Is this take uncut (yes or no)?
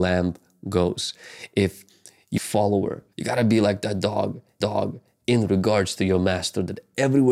no